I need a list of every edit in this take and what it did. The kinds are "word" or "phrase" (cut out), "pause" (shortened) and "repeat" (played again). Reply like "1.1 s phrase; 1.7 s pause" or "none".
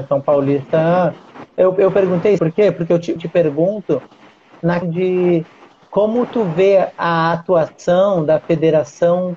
2.4 s word; 3.2 s word; 4.8 s word